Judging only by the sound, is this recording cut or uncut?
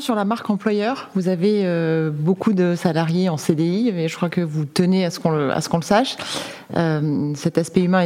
uncut